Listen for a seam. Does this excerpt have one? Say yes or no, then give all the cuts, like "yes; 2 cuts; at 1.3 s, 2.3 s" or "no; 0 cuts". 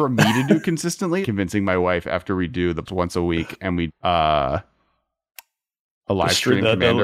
yes; 3 cuts; at 1.2 s, 2.9 s, 3.9 s